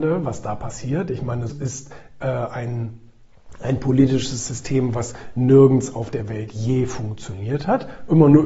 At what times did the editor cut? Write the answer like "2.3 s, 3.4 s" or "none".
1.5 s